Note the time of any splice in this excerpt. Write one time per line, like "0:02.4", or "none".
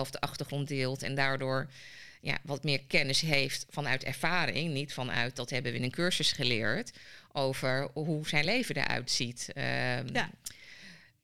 none